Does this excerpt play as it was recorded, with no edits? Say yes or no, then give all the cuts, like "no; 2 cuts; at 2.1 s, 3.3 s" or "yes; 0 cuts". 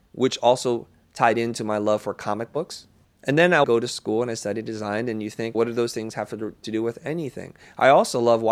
no; 3 cuts; at 3.0 s, 3.6 s, 5.5 s